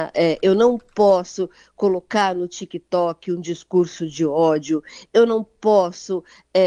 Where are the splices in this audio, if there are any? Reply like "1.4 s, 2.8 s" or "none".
none